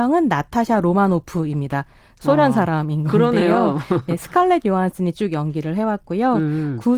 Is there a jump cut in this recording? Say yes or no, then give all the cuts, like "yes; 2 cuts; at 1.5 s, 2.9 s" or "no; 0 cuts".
no; 0 cuts